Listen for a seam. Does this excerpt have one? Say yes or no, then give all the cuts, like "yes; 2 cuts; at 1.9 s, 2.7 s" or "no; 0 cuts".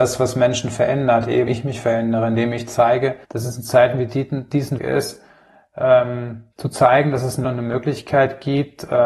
yes; 5 cuts; at 1.5 s, 3.2 s, 4.8 s, 6.5 s, 7.4 s